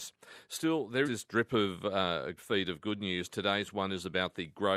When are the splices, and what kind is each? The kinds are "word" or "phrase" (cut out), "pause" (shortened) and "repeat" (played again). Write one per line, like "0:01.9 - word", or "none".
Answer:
0:01.0 - word
0:02.4 - phrase